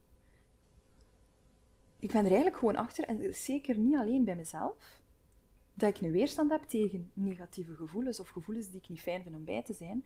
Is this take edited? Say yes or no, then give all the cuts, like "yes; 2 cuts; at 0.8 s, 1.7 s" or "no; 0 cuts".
no; 0 cuts